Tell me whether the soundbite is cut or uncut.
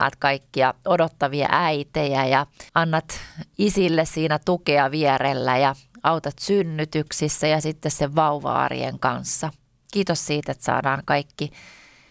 cut